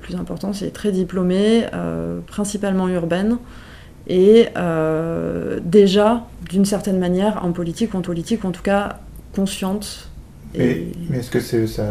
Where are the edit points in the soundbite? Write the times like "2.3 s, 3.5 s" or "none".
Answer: 7.4 s, 8.0 s